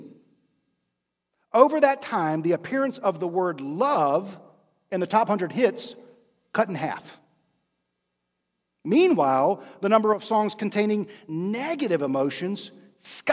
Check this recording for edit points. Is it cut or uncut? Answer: uncut